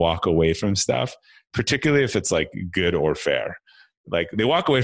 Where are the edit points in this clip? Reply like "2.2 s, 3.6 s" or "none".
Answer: none